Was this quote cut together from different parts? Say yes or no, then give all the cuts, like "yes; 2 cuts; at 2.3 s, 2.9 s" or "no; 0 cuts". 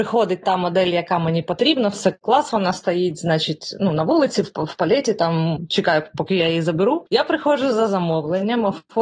yes; 1 cut; at 2.2 s